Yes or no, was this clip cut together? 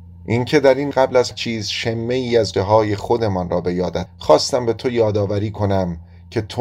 yes